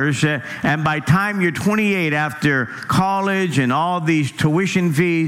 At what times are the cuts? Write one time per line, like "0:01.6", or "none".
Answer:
none